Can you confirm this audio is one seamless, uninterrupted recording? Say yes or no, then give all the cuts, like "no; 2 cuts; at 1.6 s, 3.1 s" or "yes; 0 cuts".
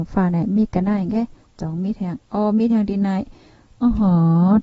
yes; 0 cuts